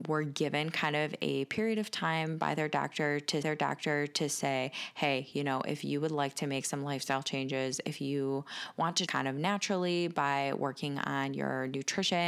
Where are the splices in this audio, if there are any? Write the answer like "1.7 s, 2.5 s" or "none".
3.4 s, 9.1 s